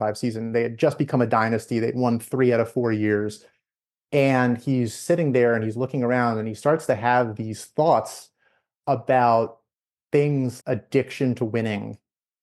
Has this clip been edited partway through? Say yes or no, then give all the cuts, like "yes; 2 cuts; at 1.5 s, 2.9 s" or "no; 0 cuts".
yes; 1 cut; at 10.6 s